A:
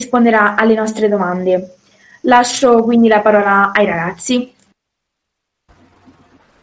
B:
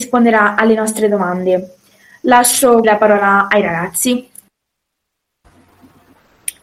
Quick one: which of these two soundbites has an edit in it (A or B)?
B